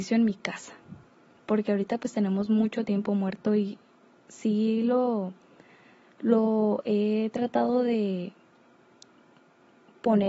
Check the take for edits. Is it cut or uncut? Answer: uncut